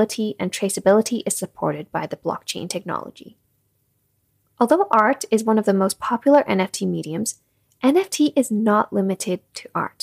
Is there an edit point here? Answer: no; 0 cuts

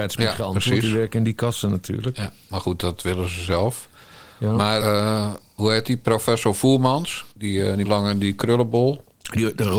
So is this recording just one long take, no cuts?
no; 3 cuts; at 4.8 s, 7.3 s, 7.8 s

